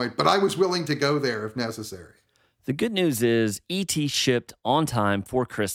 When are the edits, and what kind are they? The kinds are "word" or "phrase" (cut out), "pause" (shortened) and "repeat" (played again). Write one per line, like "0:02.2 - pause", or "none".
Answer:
none